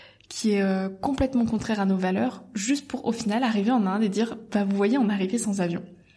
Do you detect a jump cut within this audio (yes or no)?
no